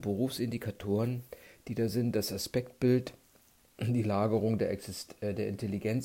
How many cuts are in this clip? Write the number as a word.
zero